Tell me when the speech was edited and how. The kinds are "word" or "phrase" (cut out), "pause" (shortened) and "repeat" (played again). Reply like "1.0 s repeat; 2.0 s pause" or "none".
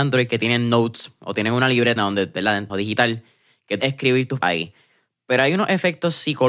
2.0 s word; 2.7 s word; 3.8 s word; 4.4 s word